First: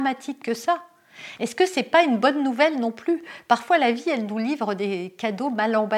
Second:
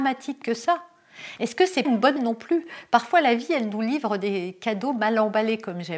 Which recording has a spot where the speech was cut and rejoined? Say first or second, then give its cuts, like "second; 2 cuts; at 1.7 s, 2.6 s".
second; 2 cuts; at 1.8 s, 2.2 s